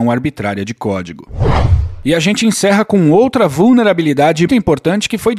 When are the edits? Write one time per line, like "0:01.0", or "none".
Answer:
0:04.5